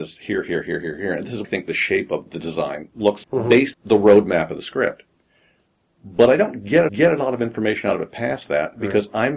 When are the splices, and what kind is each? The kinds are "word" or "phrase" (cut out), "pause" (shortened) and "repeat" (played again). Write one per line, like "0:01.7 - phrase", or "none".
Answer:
0:01.4 - phrase
0:03.2 - word
0:03.7 - word
0:06.9 - repeat